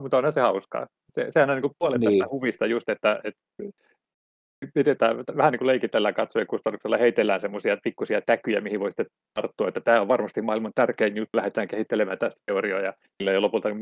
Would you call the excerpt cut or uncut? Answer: uncut